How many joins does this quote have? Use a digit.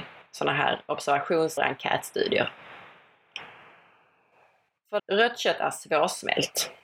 2